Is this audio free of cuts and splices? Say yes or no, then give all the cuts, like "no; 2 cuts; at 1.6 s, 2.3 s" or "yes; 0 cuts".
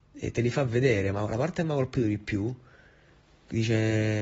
yes; 0 cuts